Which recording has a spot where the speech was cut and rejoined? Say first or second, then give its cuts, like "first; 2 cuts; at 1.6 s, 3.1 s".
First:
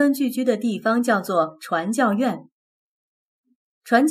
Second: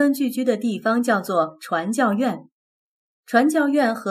second; 1 cut; at 3.0 s